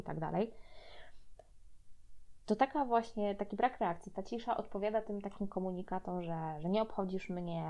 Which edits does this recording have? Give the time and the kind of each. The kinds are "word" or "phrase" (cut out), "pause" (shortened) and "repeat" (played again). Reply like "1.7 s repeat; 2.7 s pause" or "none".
none